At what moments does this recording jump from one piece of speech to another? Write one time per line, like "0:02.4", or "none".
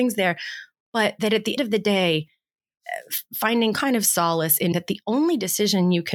0:01.6
0:03.7
0:04.7